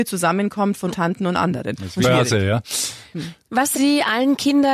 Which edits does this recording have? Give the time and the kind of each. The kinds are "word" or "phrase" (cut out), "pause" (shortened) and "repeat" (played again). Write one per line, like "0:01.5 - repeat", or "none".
0:00.9 - word
0:02.0 - word
0:03.7 - word